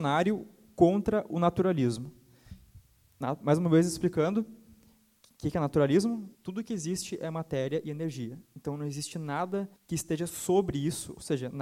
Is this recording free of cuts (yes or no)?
no